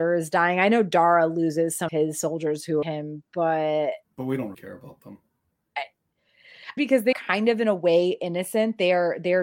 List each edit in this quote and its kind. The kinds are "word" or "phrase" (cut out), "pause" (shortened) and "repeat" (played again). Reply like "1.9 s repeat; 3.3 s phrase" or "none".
1.9 s word; 2.8 s phrase; 4.0 s pause; 4.5 s word; 6.8 s phrase; 7.1 s word